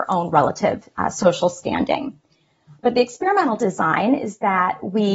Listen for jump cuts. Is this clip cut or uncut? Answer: uncut